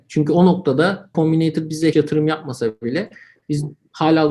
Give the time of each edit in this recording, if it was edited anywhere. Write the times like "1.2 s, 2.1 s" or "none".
1.1 s, 1.9 s